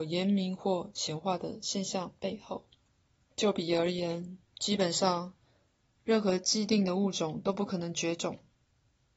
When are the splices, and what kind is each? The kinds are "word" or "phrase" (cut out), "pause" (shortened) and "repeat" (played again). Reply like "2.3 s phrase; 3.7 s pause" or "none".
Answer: 2.9 s pause; 4.5 s pause